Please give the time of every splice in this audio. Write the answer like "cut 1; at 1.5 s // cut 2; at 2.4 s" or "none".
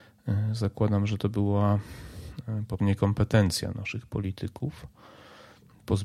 cut 1; at 2.8 s // cut 2; at 3.7 s